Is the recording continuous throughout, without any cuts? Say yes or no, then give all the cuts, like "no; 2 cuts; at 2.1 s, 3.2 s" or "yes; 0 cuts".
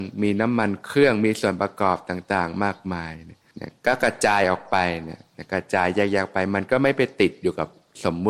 no; 1 cut; at 3.5 s